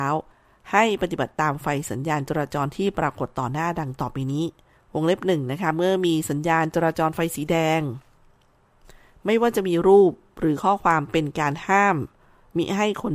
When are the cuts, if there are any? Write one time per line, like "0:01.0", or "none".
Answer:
0:04.8